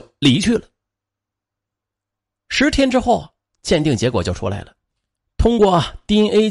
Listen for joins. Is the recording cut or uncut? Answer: uncut